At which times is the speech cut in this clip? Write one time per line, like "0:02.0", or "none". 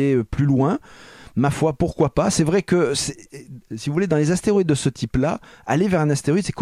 none

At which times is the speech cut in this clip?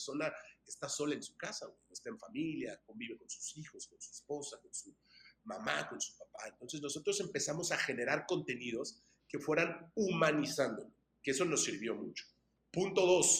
none

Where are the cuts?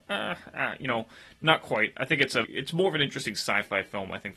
0:02.4

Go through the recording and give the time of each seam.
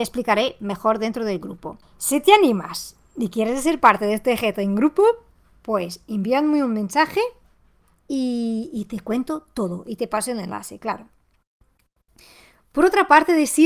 none

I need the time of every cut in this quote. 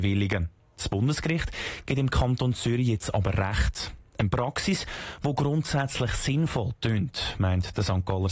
none

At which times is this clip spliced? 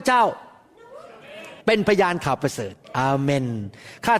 0:01.6
0:02.8

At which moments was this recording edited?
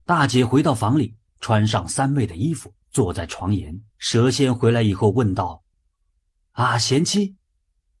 0:01.3
0:02.8
0:03.9
0:05.7

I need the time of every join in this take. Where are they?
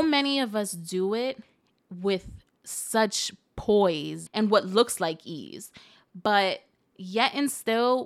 0:04.3

